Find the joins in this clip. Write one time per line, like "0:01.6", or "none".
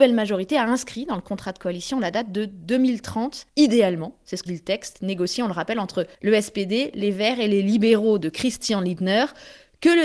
0:03.5
0:04.5
0:06.1